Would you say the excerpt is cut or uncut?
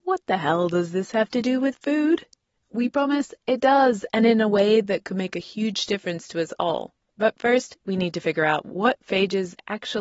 uncut